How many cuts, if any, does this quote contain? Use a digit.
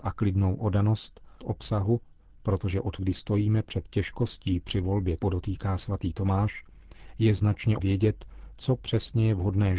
4